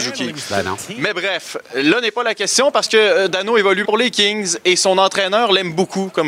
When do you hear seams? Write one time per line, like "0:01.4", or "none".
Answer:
0:03.8